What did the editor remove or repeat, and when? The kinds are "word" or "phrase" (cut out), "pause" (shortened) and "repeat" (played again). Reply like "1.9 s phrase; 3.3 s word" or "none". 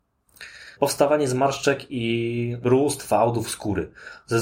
none